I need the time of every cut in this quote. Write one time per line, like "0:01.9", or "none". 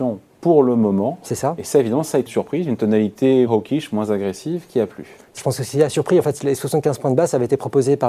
0:02.3
0:03.5
0:05.4